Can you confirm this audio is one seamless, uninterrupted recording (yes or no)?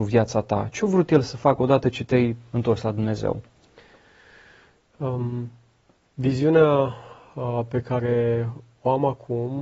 yes